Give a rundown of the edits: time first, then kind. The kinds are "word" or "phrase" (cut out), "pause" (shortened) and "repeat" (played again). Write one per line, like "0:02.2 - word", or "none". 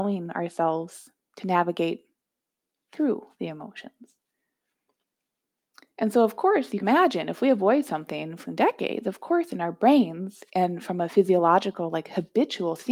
0:06.8 - word
0:08.4 - word